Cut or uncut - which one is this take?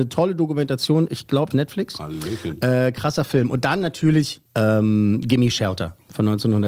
cut